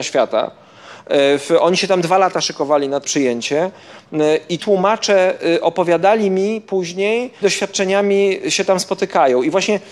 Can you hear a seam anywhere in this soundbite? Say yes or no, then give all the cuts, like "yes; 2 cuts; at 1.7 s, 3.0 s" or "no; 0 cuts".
yes; 3 cuts; at 3.0 s, 4.6 s, 7.4 s